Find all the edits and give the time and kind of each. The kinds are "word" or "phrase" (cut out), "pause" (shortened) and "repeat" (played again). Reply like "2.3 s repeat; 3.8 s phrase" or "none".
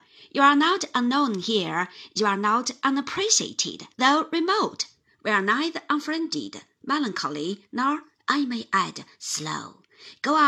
3.9 s pause